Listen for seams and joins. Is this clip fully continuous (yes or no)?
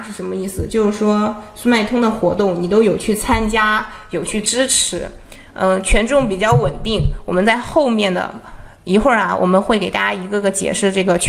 yes